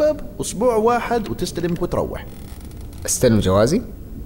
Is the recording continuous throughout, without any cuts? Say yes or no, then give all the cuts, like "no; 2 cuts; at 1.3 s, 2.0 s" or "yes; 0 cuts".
no; 1 cut; at 1.8 s